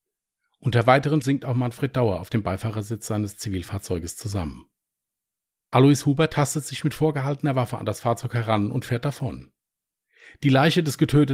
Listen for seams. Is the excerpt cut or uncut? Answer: cut